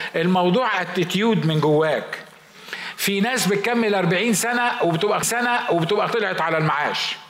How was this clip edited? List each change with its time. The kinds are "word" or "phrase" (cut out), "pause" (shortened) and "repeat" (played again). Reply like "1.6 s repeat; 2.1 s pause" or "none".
5.2 s repeat